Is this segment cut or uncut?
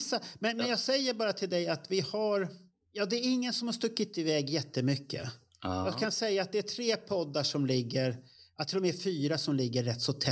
uncut